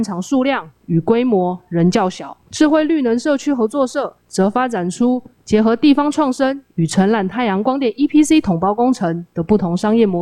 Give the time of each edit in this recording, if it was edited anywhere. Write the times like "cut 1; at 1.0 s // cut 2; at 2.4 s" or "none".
none